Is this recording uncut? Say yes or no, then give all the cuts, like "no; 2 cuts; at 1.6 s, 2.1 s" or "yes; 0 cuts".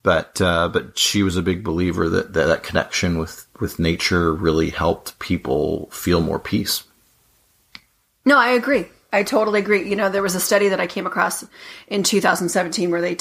yes; 0 cuts